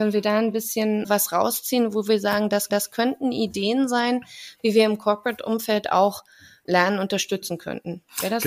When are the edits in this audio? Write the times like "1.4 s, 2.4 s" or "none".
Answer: 2.7 s